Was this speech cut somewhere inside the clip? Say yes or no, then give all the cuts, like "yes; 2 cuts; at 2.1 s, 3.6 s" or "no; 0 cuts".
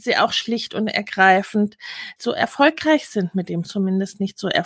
yes; 2 cuts; at 2.2 s, 3.6 s